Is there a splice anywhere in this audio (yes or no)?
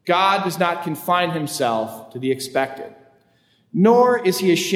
no